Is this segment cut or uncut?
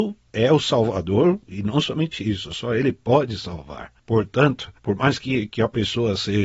cut